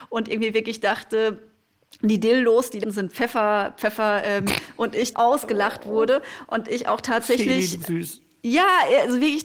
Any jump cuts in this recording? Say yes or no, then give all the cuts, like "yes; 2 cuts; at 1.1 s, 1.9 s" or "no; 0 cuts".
yes; 4 cuts; at 2.8 s, 4.5 s, 5.1 s, 7.8 s